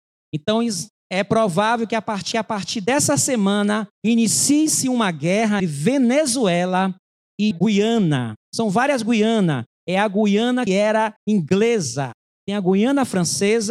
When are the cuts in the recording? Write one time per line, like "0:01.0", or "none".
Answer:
0:02.3
0:03.9
0:05.6
0:07.5
0:10.7
0:11.2